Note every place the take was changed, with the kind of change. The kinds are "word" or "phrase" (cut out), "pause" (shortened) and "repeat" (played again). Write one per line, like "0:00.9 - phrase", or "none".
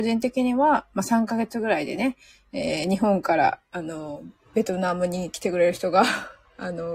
none